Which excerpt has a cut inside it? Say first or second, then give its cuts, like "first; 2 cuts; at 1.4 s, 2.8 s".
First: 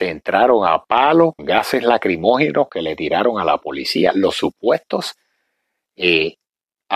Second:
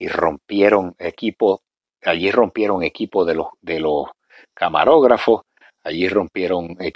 first; 1 cut; at 1.4 s